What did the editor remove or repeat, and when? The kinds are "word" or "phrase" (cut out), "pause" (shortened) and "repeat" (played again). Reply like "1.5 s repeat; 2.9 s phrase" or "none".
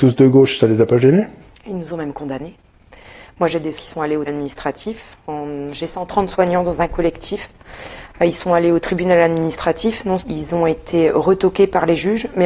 3.8 s word; 4.3 s word; 10.2 s word